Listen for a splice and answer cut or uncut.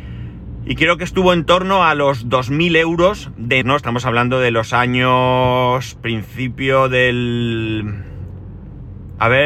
cut